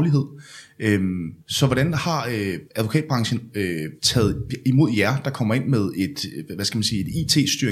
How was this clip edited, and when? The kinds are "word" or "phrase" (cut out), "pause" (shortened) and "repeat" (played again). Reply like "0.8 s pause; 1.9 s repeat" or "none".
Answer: 1.4 s pause; 2.7 s pause; 4.0 s pause